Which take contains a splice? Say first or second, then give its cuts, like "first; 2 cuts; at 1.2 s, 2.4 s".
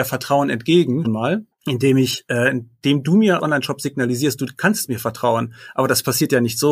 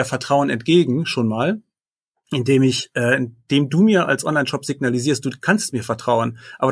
first; 3 cuts; at 1.0 s, 1.5 s, 3.4 s